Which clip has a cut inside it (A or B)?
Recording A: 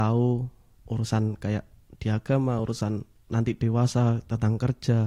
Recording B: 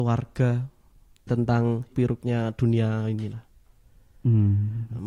B